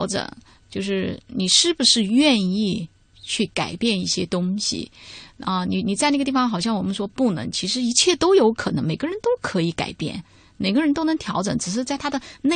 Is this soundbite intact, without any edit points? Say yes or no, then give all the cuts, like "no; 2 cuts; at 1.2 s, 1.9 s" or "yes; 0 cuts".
yes; 0 cuts